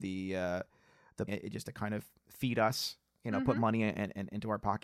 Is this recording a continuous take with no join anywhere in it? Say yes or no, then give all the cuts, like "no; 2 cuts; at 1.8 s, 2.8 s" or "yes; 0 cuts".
no; 1 cut; at 1.3 s